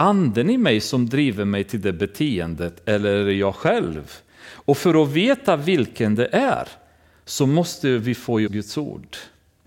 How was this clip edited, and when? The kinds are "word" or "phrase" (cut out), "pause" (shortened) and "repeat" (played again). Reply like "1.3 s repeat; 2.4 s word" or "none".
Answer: 8.5 s word